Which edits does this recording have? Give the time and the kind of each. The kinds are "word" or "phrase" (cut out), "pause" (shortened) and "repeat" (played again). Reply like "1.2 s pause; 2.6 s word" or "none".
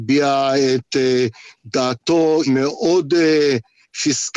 2.5 s word